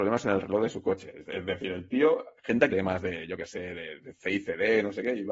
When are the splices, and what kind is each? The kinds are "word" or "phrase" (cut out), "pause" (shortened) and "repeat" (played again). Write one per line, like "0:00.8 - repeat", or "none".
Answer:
0:02.7 - word